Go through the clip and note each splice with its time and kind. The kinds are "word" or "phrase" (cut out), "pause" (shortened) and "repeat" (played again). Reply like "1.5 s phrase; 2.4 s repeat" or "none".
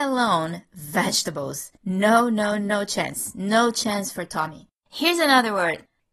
1.8 s pause; 4.8 s pause